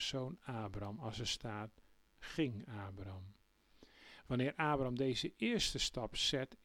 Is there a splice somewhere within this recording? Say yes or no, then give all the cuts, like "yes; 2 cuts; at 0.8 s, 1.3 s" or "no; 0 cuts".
yes; 1 cut; at 2.1 s